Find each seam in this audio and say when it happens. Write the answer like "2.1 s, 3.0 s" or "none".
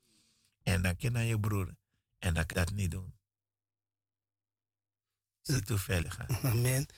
1.0 s, 2.5 s, 6.0 s